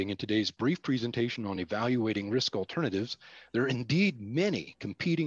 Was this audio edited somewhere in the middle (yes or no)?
no